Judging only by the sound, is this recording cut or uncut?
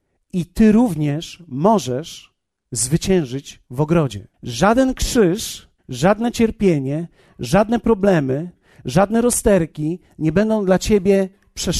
cut